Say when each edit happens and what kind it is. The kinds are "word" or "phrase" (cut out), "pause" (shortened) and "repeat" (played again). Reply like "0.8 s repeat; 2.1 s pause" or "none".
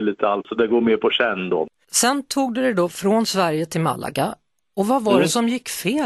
none